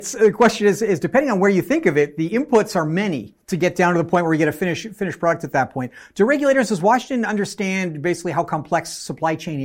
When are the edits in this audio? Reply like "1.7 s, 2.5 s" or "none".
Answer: 3.4 s